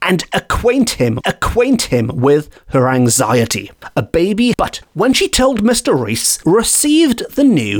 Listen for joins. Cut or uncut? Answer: cut